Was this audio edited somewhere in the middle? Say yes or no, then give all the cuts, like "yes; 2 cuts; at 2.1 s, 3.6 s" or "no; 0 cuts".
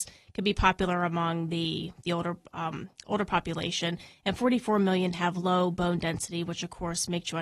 no; 0 cuts